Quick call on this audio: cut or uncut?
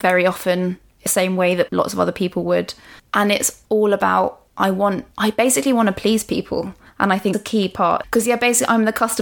cut